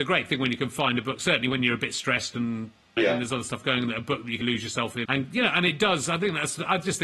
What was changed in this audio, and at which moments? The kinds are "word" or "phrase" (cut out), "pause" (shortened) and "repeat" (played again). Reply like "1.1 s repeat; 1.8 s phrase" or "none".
3.0 s word; 4.4 s word; 5.0 s word